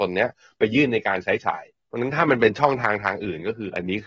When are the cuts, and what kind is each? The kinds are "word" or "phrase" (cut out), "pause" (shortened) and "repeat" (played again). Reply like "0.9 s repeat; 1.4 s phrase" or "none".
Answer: 1.7 s pause